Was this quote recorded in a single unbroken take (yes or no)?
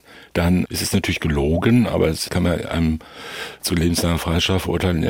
yes